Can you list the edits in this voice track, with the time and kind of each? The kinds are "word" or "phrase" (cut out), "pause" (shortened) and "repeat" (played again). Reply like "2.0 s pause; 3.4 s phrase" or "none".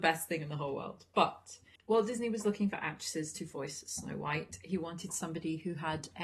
1.8 s pause